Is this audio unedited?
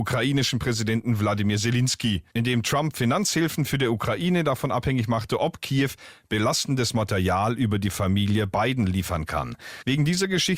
yes; 0 cuts

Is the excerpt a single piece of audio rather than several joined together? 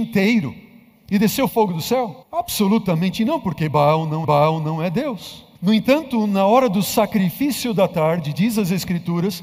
no; 3 cuts; at 2.2 s, 4.2 s, 5.5 s

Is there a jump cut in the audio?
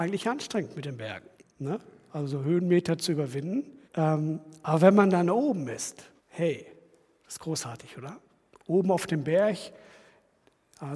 yes; 3 cuts; at 1.3 s, 3.8 s, 6.2 s

